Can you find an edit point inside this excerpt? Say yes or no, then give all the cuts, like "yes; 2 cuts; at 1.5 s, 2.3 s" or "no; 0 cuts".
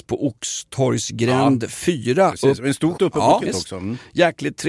yes; 2 cuts; at 3.0 s, 3.4 s